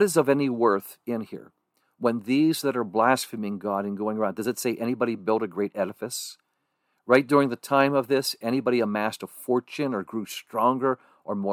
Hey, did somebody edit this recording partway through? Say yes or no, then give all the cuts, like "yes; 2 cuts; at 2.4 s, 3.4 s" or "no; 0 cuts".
no; 0 cuts